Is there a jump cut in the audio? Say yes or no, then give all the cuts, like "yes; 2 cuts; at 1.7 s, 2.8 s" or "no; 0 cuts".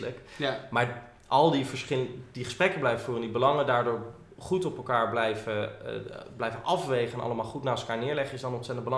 no; 0 cuts